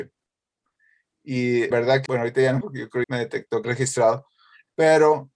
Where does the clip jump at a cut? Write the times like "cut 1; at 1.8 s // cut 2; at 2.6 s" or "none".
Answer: cut 1; at 1.7 s // cut 2; at 2.1 s // cut 3; at 2.6 s // cut 4; at 3.0 s // cut 5; at 3.6 s

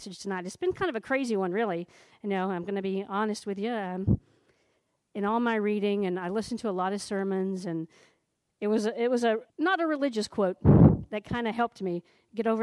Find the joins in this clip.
cut 1; at 9.5 s

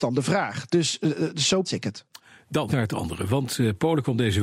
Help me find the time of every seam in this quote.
cut 1; at 1.6 s // cut 2; at 2.7 s

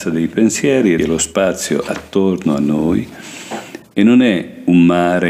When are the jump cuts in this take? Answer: cut 1; at 1.0 s

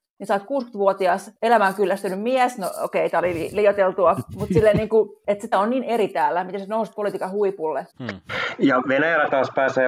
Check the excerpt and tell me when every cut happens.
cut 1; at 5.5 s // cut 2; at 7.9 s

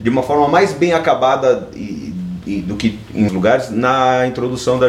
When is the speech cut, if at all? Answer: cut 1; at 3.3 s

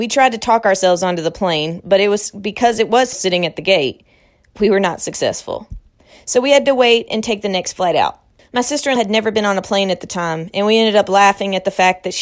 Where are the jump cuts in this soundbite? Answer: cut 1; at 3.1 s // cut 2; at 9.0 s

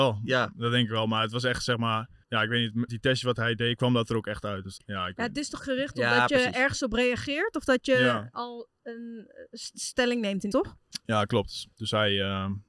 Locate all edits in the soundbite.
cut 1; at 2.2 s // cut 2; at 2.9 s // cut 3; at 4.8 s // cut 4; at 5.6 s // cut 5; at 8.3 s // cut 6; at 10.5 s // cut 7; at 11.7 s

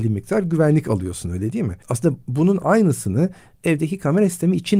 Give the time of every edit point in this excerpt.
cut 1; at 1.8 s

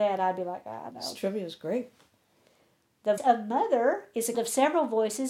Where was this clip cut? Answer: cut 1; at 0.9 s // cut 2; at 3.2 s // cut 3; at 4.3 s

